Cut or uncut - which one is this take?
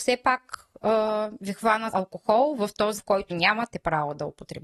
cut